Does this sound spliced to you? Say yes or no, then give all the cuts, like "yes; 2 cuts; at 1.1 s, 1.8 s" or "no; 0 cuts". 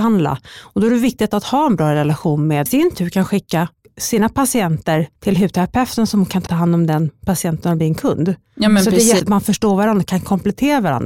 yes; 5 cuts; at 2.7 s, 3.7 s, 5.2 s, 6.5 s, 9.2 s